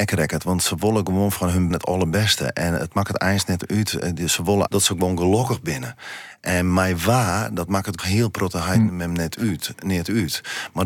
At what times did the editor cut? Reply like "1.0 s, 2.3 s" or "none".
1.7 s, 4.7 s, 8.0 s